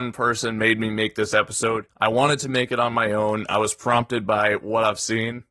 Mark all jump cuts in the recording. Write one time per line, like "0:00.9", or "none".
0:01.9

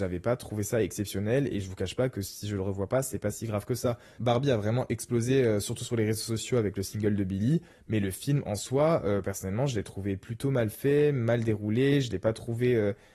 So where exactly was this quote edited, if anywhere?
none

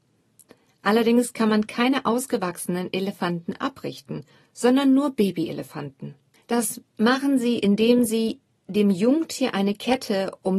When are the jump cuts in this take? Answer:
none

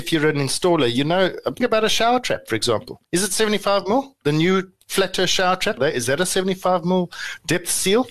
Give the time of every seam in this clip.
0:01.6
0:03.0
0:05.8

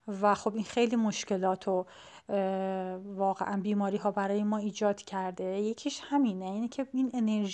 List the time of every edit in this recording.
none

